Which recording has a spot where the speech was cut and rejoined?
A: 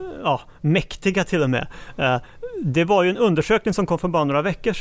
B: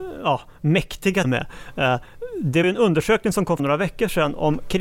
B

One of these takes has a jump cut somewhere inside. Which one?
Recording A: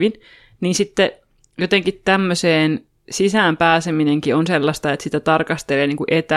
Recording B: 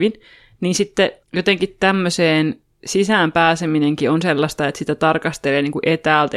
B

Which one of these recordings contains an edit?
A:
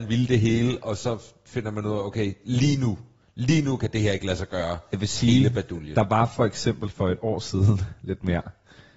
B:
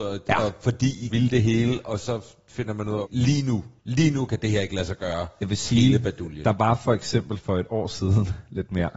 B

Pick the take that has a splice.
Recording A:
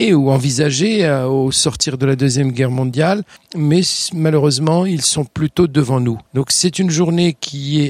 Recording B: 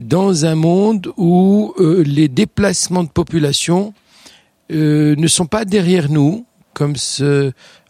A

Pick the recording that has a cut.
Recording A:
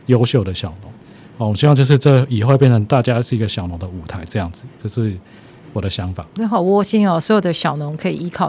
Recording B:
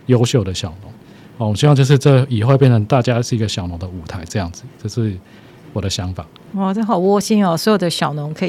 A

